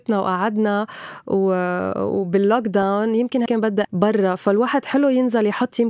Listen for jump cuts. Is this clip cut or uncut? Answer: cut